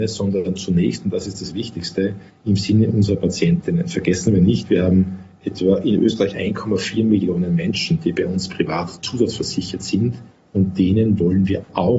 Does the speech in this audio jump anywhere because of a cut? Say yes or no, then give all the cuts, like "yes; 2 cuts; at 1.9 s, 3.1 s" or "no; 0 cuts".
yes; 1 cut; at 6.3 s